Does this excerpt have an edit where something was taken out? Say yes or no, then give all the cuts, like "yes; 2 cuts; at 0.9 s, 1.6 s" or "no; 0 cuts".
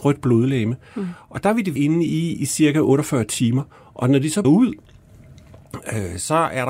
yes; 2 cuts; at 1.8 s, 4.4 s